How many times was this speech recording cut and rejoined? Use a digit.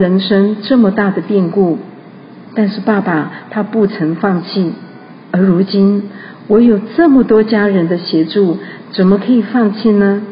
2